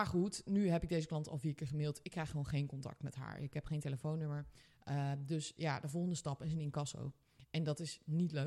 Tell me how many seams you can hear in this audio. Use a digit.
0